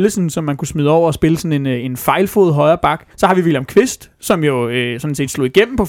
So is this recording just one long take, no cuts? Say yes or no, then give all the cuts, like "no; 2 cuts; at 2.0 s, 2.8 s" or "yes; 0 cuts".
no; 1 cut; at 3.1 s